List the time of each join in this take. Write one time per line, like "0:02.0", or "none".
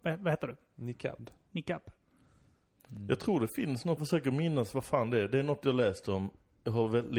0:04.0